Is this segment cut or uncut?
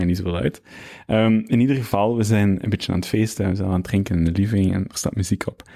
uncut